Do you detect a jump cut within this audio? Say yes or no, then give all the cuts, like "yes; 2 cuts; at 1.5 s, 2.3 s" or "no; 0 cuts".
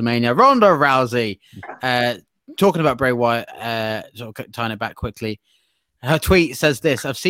no; 0 cuts